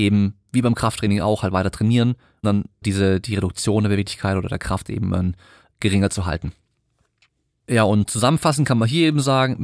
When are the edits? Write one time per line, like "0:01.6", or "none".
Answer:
0:02.4
0:02.8
0:05.7